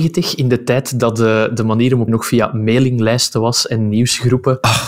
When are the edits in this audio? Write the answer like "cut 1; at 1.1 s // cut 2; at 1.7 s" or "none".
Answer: cut 1; at 2.1 s